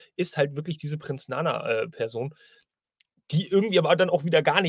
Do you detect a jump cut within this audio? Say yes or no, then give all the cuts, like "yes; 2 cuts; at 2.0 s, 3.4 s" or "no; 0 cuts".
no; 0 cuts